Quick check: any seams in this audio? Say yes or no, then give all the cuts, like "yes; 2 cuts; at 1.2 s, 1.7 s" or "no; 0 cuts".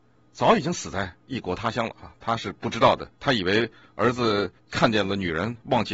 yes; 2 cuts; at 3.1 s, 4.6 s